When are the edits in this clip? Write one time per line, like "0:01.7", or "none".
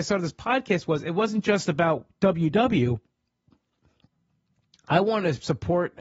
none

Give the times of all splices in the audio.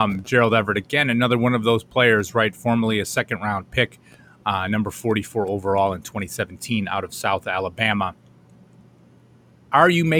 none

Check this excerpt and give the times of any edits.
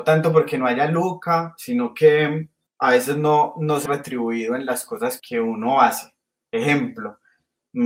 0:02.7
0:03.9
0:05.2

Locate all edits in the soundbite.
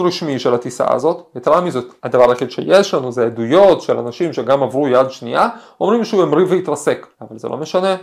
0:02.0
0:07.1

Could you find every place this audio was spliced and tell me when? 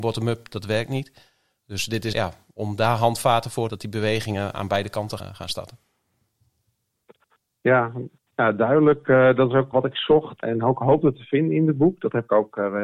0:02.1
0:03.7
0:05.2
0:09.7
0:10.4

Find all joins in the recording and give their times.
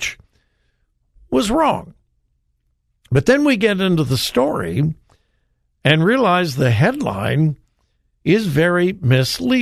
none

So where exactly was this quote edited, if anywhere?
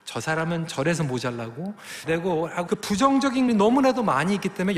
0:02.1
0:02.7
0:03.5

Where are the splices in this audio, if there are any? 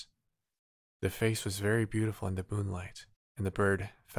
0:03.1

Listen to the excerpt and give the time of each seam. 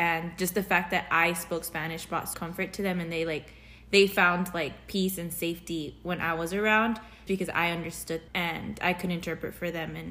0:02.3
0:07.3
0:08.3

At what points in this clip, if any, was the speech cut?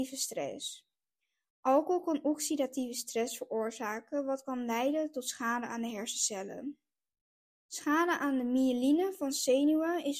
none

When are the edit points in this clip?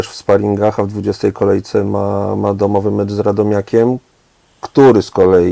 none

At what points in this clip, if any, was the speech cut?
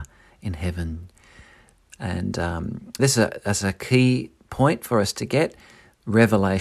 0:03.0

